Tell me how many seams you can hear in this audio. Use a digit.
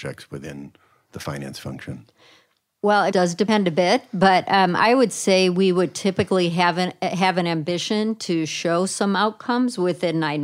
1